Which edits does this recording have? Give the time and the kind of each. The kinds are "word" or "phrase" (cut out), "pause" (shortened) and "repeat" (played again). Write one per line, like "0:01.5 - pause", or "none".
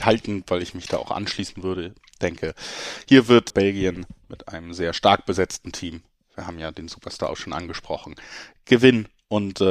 0:03.5 - word